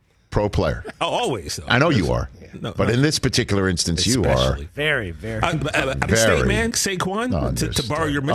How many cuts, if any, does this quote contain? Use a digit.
2